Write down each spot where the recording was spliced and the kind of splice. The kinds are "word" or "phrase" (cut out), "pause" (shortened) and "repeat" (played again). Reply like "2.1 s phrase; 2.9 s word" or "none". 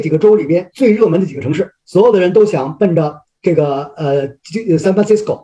1.8 s pause